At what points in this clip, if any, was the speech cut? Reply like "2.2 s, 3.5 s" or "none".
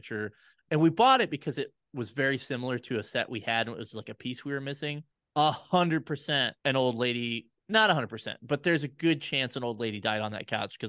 5.1 s, 6.6 s, 7.6 s